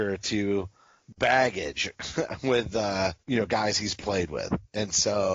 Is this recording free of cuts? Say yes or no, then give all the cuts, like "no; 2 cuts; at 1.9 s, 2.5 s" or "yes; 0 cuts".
no; 1 cut; at 3.2 s